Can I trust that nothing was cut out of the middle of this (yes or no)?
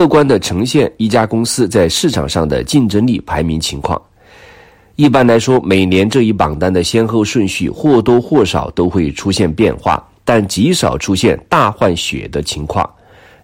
yes